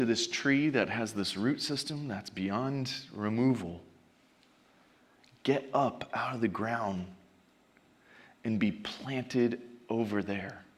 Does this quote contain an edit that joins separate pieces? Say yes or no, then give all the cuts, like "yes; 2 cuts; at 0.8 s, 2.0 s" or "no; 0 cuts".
no; 0 cuts